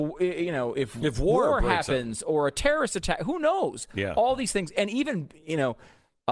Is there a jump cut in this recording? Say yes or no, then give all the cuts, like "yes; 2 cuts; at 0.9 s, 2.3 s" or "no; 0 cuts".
no; 0 cuts